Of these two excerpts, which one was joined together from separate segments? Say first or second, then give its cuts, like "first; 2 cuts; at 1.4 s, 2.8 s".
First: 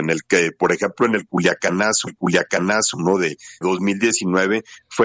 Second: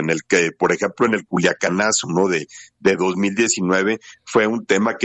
first; 2 cuts; at 2.1 s, 3.6 s